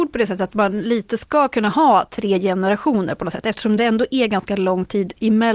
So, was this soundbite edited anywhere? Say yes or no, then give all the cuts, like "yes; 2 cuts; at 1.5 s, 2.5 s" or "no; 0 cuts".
no; 0 cuts